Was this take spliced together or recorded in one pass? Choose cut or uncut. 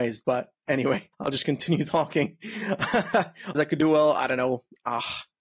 cut